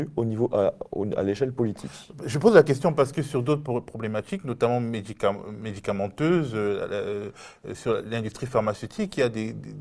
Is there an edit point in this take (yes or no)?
no